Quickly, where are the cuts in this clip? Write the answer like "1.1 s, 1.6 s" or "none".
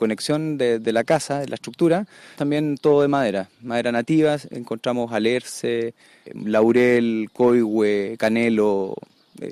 2.4 s, 6.3 s